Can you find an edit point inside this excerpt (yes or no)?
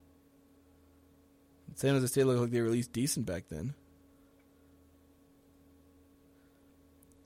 no